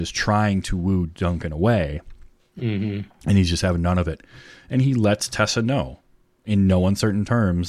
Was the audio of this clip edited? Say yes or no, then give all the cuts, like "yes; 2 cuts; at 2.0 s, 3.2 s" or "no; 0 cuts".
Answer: no; 0 cuts